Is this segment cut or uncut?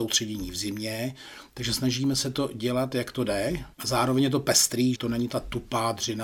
cut